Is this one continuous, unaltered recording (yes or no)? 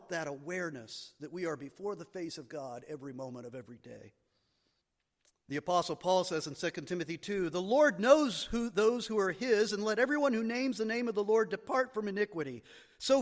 no